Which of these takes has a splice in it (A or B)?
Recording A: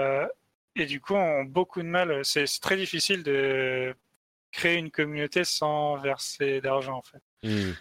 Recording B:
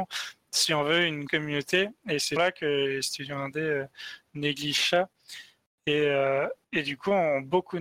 B